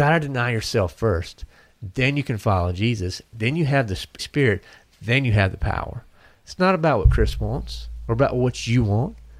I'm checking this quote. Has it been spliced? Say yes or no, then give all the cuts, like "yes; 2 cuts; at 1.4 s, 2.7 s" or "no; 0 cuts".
yes; 1 cut; at 4.2 s